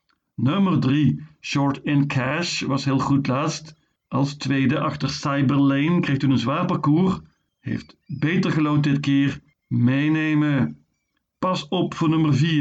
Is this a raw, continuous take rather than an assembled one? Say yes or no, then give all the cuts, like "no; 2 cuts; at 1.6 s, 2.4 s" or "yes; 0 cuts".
yes; 0 cuts